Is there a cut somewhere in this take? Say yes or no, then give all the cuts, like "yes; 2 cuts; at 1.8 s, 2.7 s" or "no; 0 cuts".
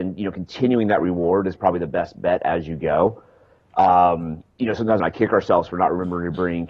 yes; 3 cuts; at 1.6 s, 4.5 s, 5.0 s